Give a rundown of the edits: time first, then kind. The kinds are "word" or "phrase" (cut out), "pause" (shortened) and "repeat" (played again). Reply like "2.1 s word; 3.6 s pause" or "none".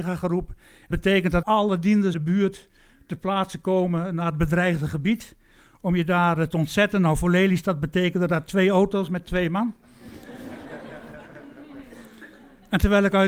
0.9 s word; 1.4 s word; 2.1 s word

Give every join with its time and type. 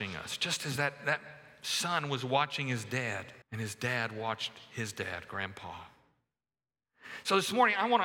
3.4 s pause

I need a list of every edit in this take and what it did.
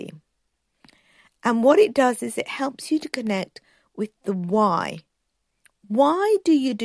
none

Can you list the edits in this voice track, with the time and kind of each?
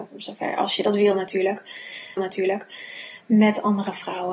2.2 s repeat

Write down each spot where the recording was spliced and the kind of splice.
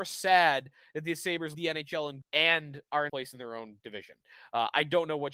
1.5 s word; 2.2 s word; 3.1 s word

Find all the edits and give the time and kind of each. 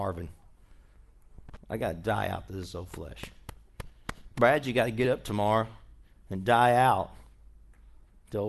none

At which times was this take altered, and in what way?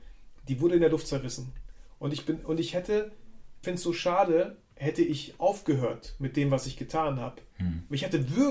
3.6 s word; 4.6 s pause

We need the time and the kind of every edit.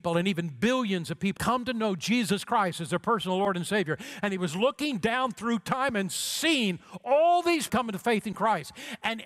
1.4 s word; 7.7 s phrase

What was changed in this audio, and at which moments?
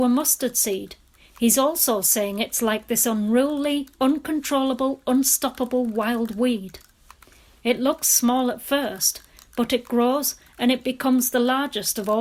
none

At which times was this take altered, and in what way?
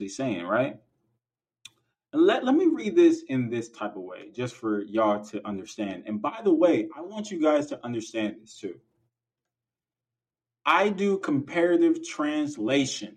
none

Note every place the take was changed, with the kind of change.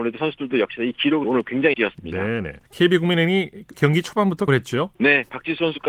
1.2 s word; 1.7 s word; 2.6 s pause; 3.7 s word; 4.5 s word; 4.9 s pause

